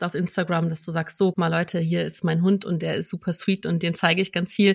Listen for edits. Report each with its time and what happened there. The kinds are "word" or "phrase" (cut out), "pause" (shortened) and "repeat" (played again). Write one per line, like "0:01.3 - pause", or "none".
0:01.3 - word